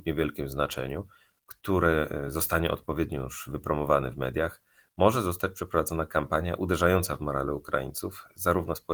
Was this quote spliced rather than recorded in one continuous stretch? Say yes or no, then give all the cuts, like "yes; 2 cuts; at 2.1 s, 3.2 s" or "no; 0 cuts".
no; 0 cuts